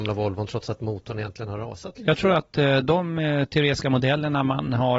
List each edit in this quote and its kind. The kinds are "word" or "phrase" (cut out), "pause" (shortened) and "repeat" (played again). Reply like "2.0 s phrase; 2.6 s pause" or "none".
none